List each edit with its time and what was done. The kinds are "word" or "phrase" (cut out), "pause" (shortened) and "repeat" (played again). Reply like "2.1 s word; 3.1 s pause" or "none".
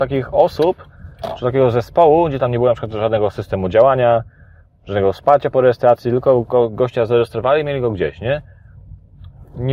none